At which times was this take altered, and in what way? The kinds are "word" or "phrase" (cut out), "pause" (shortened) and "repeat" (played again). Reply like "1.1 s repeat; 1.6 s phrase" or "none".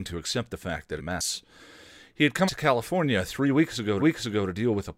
1.0 s phrase; 2.5 s word; 4.0 s repeat